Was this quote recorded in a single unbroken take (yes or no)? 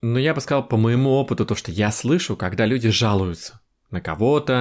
yes